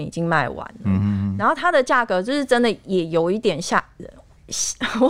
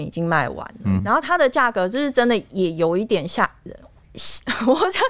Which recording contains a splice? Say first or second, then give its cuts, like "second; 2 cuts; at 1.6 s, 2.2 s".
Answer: second; 1 cut; at 1.0 s